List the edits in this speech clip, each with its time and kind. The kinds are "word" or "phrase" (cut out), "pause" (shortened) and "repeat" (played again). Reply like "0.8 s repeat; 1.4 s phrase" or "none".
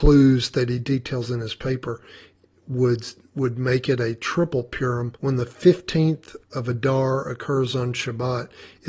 5.2 s pause; 6.4 s pause